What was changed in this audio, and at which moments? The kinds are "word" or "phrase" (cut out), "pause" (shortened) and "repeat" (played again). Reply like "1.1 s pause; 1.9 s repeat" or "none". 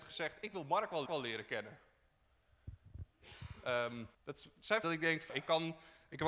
1.1 s repeat; 4.1 s pause; 4.8 s phrase; 5.3 s word